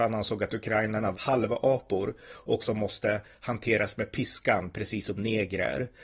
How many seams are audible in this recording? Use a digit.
2